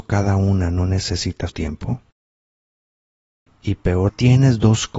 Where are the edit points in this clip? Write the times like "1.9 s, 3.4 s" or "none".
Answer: 1.5 s, 4.1 s